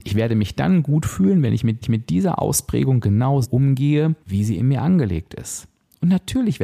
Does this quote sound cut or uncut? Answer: cut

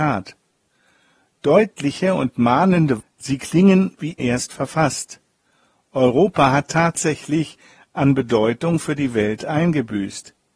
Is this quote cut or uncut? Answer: cut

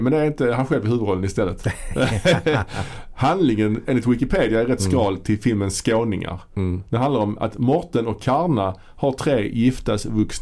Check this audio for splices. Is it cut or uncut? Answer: uncut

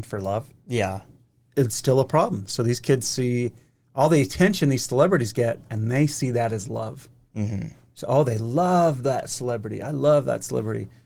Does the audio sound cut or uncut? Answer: uncut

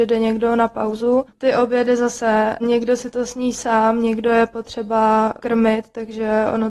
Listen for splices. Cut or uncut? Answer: cut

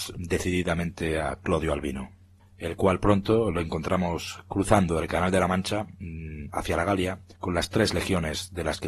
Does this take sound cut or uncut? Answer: cut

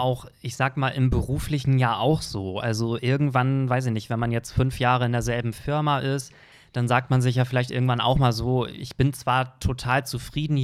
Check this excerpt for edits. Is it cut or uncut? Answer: uncut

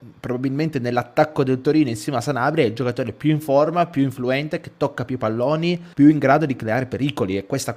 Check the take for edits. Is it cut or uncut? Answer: cut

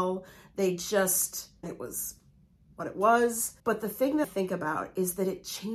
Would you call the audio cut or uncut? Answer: cut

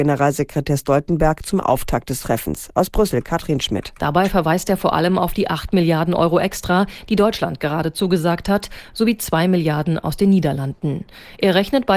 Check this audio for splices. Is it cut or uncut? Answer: uncut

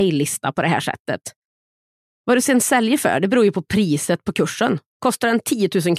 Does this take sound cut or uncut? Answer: uncut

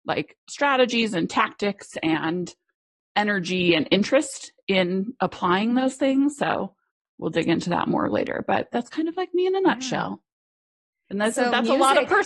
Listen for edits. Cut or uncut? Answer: uncut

